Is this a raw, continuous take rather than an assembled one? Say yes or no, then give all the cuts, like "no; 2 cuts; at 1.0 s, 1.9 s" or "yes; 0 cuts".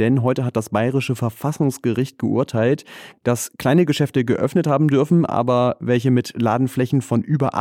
yes; 0 cuts